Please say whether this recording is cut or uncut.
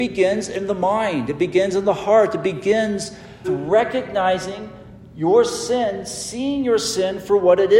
cut